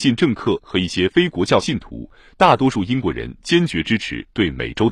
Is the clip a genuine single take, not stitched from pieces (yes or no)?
yes